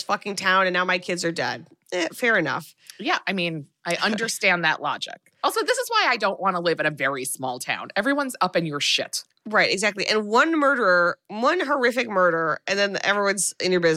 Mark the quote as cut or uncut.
uncut